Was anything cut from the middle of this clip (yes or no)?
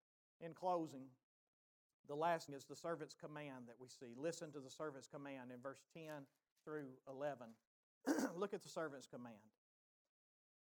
yes